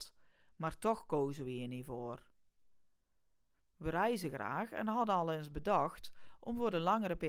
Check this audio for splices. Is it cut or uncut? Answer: uncut